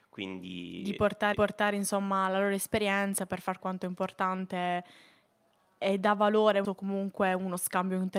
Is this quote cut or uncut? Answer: cut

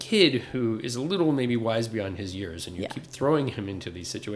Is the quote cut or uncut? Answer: uncut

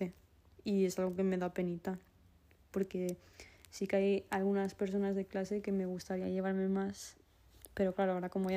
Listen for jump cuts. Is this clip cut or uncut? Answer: uncut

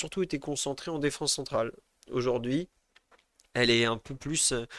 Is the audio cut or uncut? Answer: uncut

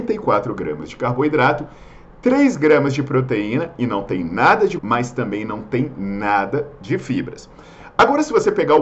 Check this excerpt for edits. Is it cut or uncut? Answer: cut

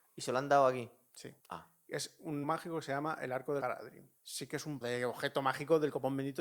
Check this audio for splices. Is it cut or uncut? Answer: cut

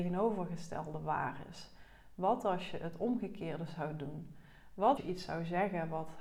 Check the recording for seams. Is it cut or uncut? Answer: cut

